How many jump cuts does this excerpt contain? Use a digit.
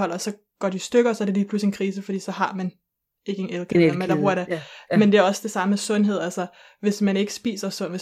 0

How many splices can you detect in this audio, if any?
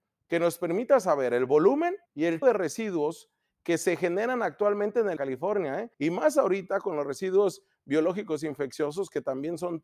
4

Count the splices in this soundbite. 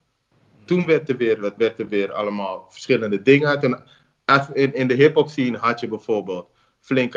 1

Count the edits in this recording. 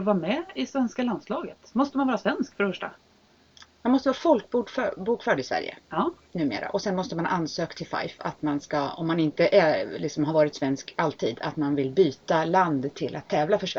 0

